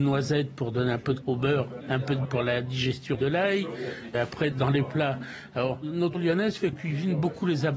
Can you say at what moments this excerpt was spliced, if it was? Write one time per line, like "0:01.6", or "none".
0:01.2
0:01.8
0:02.2
0:03.1
0:04.5
0:06.1
0:06.7